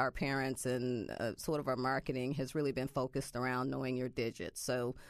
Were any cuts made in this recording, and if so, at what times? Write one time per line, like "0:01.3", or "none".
none